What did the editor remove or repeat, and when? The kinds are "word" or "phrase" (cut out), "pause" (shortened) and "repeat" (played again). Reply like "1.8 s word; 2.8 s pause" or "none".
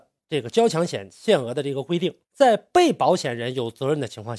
2.2 s pause